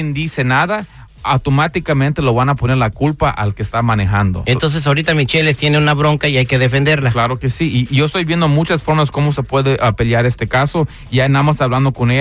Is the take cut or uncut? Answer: uncut